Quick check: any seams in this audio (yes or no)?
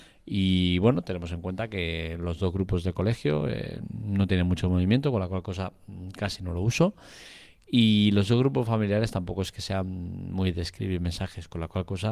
no